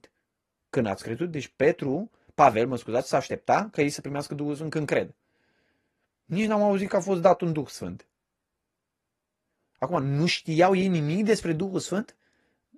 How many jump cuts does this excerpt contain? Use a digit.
0